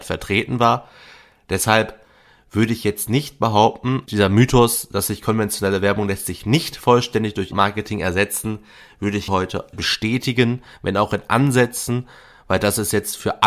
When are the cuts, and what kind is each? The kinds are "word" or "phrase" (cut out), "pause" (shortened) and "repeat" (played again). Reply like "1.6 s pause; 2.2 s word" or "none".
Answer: 4.1 s word; 7.5 s word; 9.3 s word; 9.7 s word